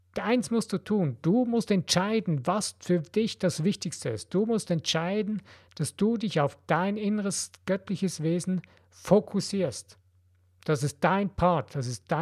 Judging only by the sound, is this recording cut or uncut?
uncut